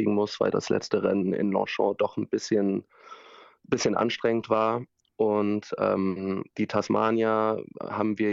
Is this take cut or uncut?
uncut